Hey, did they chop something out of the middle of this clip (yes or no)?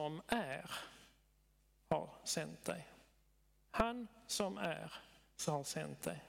no